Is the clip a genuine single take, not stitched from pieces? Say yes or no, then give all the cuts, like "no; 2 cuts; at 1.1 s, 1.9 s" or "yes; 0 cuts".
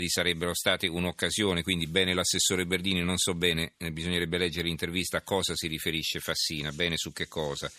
yes; 0 cuts